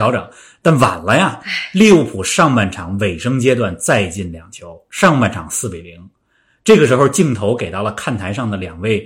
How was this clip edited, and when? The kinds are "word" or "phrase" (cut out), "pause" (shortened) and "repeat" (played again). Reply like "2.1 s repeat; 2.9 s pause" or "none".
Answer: none

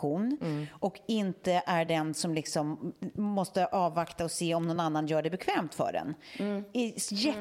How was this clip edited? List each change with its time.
none

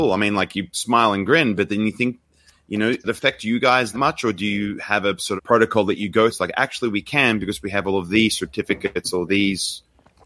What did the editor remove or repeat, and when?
3.0 s word; 3.9 s word; 5.4 s word; 6.3 s word

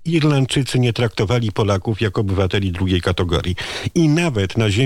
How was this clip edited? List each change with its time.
none

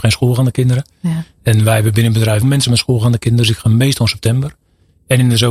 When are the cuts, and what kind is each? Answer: 2.4 s word

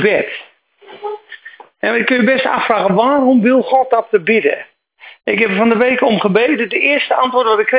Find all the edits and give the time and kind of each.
none

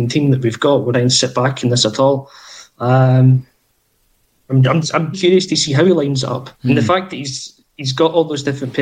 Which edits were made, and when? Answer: 0.9 s phrase; 5.1 s word; 6.5 s pause

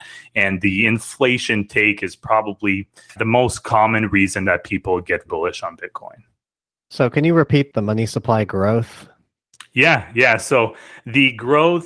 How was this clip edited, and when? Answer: 3.2 s word; 5.3 s word

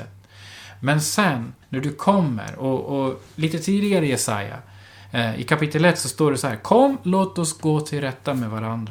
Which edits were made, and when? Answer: 1.6 s pause

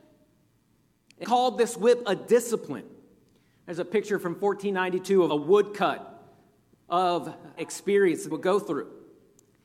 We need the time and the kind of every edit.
1.2 s word; 5.3 s word; 7.6 s word; 8.3 s word

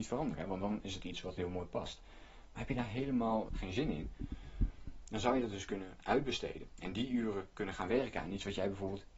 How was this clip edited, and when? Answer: 3.5 s word

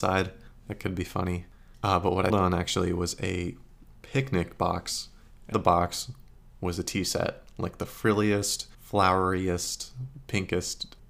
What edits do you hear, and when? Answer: 2.3 s word; 4.0 s pause; 5.5 s word; 8.7 s pause

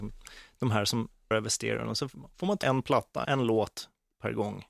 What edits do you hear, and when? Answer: 1.3 s word; 2.6 s word; 3.2 s word

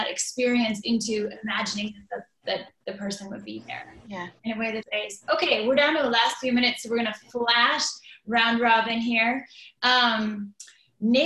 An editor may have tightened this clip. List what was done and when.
4.4 s pause; 4.8 s phrase

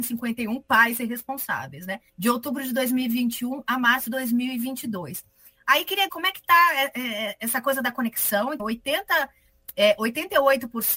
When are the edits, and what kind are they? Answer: 2.1 s pause; 4.1 s word; 6.1 s word; 8.6 s word

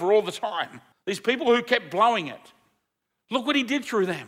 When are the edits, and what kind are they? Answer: 0.9 s pause

